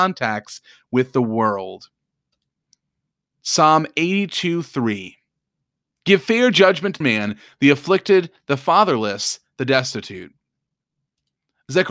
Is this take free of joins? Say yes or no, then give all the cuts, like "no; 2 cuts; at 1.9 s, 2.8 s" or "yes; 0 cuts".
no; 1 cut; at 7.0 s